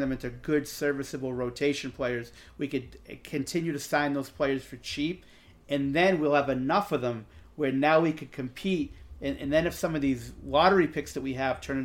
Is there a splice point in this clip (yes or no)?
no